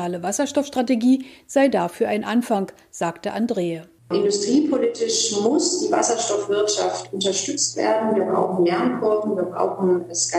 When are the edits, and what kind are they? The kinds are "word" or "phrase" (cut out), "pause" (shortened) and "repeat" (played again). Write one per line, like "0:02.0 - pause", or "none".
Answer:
none